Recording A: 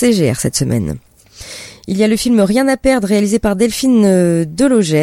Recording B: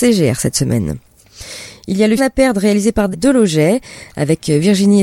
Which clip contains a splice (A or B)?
B